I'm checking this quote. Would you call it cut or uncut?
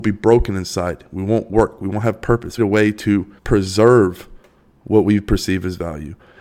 cut